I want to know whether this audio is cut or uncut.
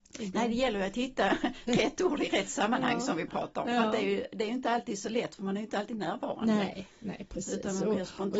uncut